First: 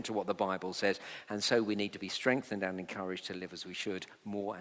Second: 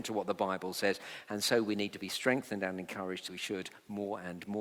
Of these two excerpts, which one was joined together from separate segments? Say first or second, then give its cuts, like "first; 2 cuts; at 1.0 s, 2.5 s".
second; 1 cut; at 3.3 s